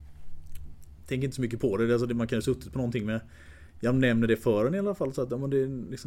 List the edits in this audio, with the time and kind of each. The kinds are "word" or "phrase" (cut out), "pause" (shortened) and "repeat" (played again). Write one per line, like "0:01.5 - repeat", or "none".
none